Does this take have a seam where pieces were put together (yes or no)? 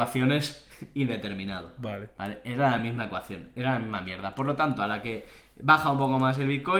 no